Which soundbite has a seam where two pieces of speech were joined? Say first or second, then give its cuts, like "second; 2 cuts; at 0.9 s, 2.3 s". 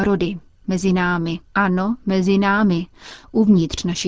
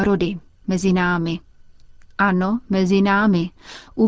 first; 1 cut; at 1.5 s